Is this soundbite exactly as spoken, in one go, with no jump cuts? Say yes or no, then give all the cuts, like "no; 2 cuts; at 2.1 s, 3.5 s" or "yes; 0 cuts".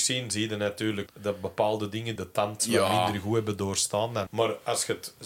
no; 4 cuts; at 1.1 s, 2.2 s, 2.6 s, 4.3 s